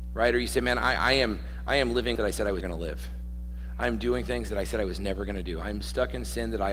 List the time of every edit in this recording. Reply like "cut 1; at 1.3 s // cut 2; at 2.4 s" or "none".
cut 1; at 2.2 s // cut 2; at 2.6 s